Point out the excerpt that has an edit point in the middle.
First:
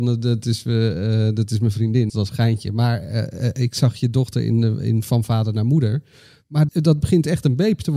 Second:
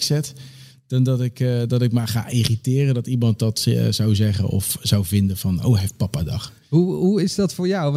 first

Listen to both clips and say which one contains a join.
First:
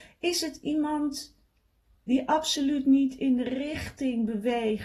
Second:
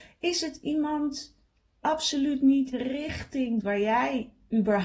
second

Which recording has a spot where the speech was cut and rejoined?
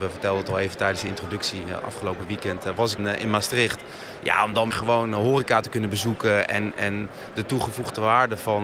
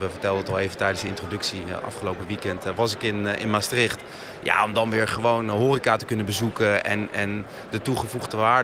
first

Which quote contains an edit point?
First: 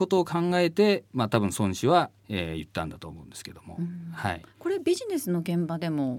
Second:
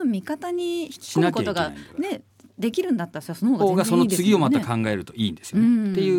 first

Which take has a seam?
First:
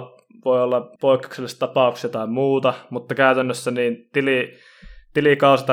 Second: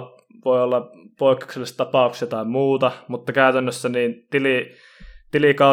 first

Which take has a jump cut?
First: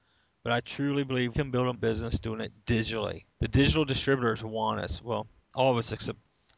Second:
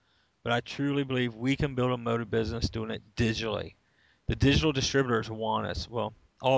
first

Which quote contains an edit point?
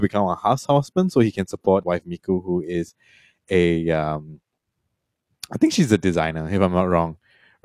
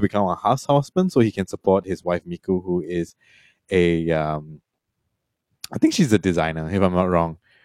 first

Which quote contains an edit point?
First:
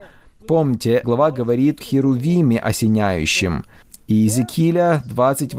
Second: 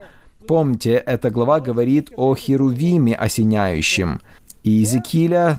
first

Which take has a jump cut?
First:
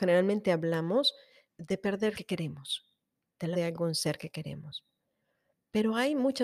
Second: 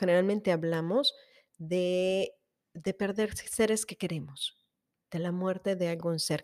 first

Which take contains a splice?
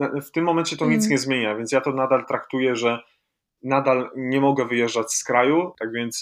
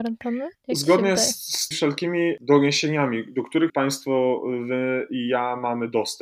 second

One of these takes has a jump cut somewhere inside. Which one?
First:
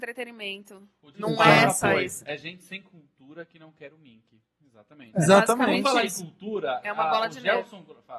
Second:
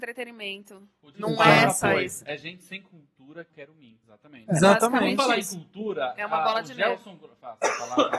second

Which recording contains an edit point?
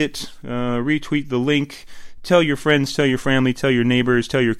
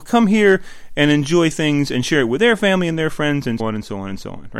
second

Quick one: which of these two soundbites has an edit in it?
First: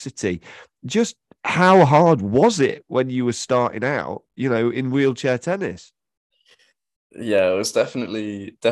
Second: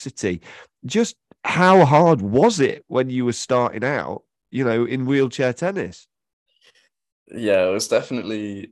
first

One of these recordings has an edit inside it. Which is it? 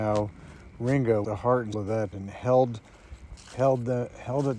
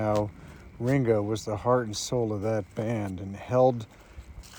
first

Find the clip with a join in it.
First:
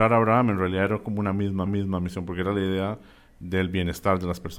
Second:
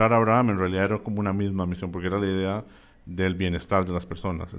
first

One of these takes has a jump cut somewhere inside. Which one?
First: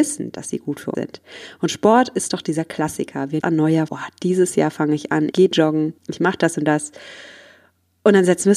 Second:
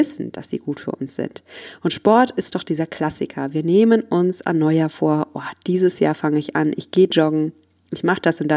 first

